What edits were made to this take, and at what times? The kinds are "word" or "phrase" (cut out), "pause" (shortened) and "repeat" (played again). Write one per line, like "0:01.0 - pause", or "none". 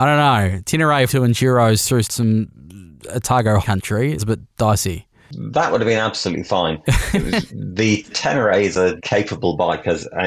0:01.1 - word
0:02.0 - word
0:03.6 - word
0:04.2 - word
0:07.5 - word
0:08.1 - word
0:09.0 - word